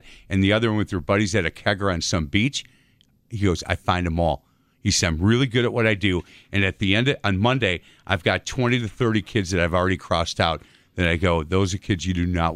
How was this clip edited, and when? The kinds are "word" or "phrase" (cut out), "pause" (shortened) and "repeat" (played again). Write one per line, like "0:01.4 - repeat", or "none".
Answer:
none